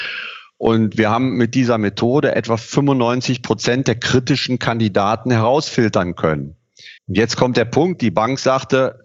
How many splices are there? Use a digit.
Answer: 1